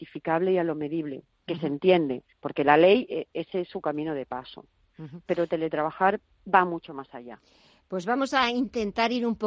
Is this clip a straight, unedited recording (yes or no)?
no